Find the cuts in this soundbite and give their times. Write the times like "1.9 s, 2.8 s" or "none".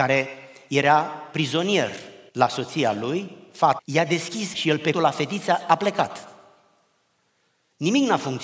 2.3 s, 3.8 s, 4.5 s, 4.9 s